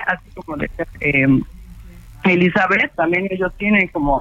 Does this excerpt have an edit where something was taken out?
yes; 2 cuts; at 0.9 s, 2.9 s

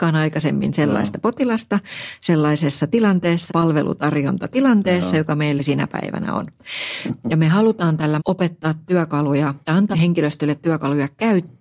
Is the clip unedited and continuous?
no; 5 cuts; at 3.5 s, 5.6 s, 8.2 s, 9.6 s, 9.9 s

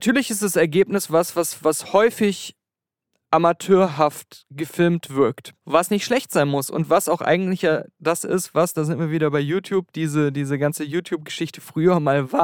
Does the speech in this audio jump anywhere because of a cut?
no; 0 cuts

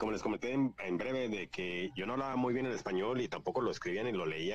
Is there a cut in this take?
no; 0 cuts

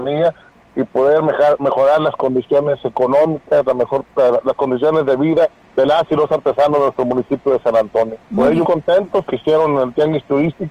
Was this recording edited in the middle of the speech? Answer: yes; 4 cuts; at 5.6 s, 8.2 s, 8.6 s, 9.3 s

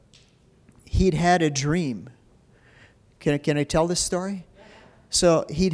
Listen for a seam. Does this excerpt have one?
no; 0 cuts

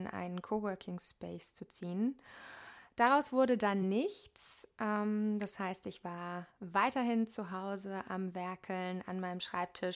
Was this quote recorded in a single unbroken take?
yes; 0 cuts

